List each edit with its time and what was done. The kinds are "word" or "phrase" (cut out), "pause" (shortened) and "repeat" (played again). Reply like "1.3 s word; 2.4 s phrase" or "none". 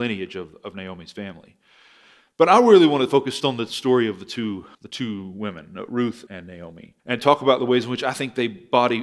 3.4 s word; 4.7 s pause; 6.3 s word; 7.0 s pause